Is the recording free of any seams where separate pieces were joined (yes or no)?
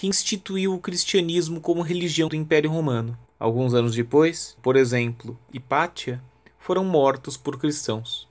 no